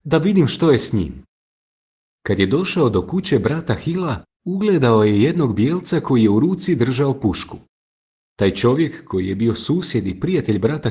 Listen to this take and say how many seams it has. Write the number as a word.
zero